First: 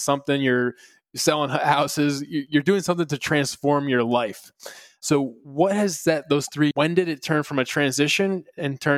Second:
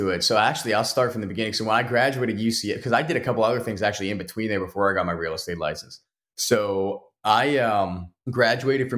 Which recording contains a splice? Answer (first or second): first